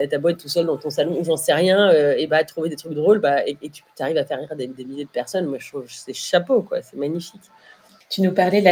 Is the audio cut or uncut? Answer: uncut